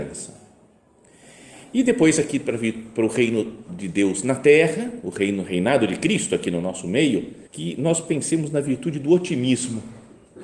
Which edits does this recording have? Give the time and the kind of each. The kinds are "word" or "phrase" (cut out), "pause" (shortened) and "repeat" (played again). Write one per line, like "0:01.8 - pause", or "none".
0:07.5 - pause